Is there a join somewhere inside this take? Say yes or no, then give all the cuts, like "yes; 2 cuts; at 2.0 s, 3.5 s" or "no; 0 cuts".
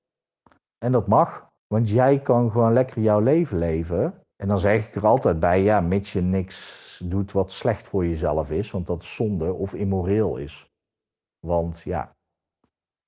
yes; 2 cuts; at 1.6 s, 4.3 s